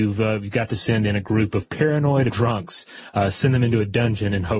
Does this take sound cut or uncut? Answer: cut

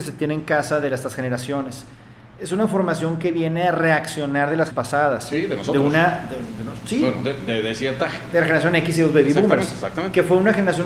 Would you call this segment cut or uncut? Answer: cut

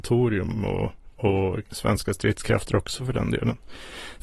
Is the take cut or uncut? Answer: uncut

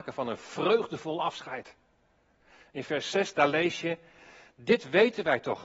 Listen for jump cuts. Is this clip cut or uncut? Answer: uncut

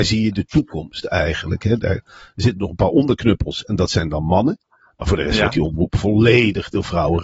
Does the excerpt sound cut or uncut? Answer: uncut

